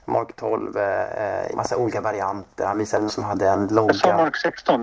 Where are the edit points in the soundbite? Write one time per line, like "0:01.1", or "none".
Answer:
0:01.5
0:03.1